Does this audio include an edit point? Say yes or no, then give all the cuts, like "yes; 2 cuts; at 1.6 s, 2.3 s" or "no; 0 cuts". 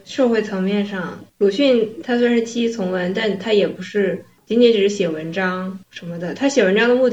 yes; 1 cut; at 5.8 s